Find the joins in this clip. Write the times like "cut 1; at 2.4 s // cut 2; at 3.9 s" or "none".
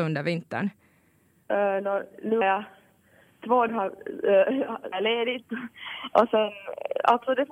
cut 1; at 2.4 s // cut 2; at 3.7 s // cut 3; at 4.9 s